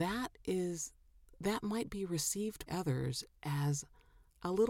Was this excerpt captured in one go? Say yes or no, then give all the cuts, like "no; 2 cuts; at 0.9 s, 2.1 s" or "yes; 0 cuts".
no; 1 cut; at 2.7 s